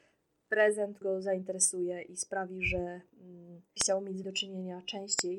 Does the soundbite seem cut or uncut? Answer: cut